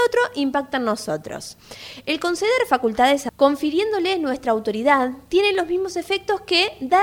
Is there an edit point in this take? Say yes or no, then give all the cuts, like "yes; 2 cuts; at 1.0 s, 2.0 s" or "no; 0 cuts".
yes; 1 cut; at 3.3 s